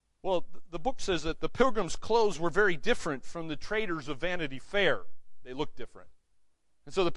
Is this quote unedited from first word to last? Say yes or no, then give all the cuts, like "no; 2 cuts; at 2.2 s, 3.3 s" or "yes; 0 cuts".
yes; 0 cuts